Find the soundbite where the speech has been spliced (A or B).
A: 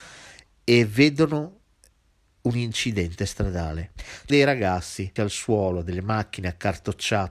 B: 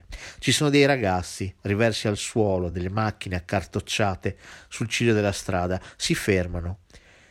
A